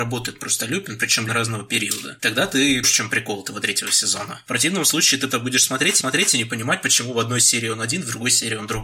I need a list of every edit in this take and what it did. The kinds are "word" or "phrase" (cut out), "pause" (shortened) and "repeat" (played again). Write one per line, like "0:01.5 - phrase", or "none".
0:01.3 - word
0:02.8 - word
0:05.3 - word
0:06.0 - repeat